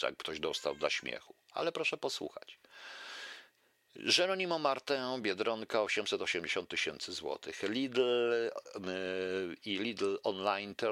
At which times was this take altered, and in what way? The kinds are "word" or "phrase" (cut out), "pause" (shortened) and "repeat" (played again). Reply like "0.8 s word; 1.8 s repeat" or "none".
none